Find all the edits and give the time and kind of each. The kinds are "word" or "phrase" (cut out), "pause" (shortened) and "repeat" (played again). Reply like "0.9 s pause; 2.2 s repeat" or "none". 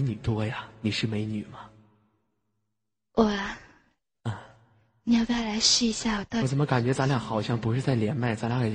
none